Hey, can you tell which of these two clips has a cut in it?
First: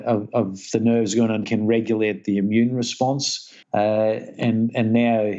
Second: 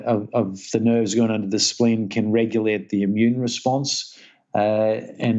first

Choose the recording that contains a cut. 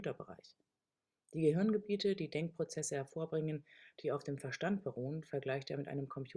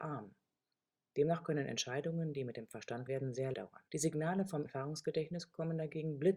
second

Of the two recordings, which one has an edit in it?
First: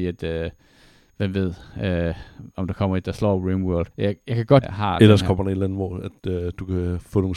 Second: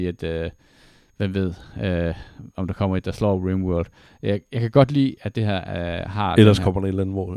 first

